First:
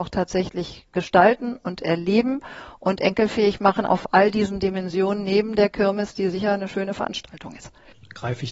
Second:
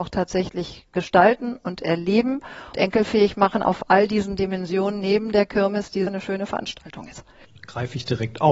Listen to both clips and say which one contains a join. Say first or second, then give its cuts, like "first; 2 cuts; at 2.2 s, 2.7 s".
second; 2 cuts; at 2.7 s, 6.1 s